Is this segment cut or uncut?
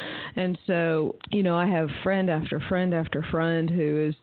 cut